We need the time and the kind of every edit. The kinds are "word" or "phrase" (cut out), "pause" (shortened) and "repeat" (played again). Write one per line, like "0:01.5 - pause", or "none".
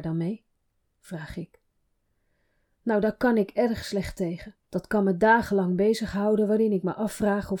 0:04.6 - pause